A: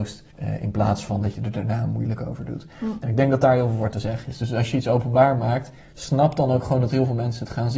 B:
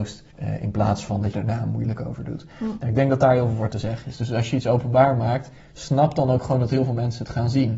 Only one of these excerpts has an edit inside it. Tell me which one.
B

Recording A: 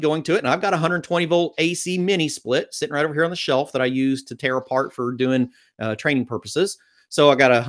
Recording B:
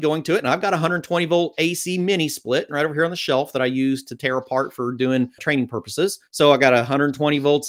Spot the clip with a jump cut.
B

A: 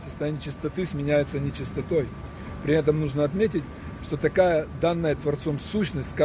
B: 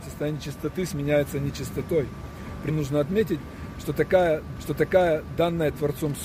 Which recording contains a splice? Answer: B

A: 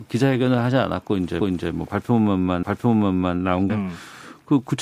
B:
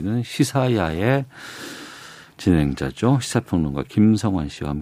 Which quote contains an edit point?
A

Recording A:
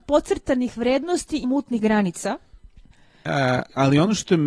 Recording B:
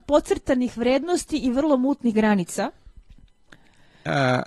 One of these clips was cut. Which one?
A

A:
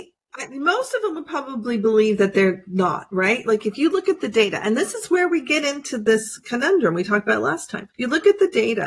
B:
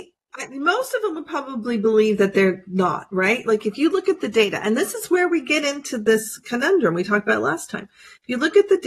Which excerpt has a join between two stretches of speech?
A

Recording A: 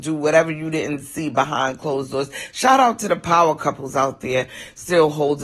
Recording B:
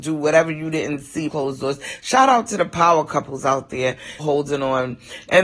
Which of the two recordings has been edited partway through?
B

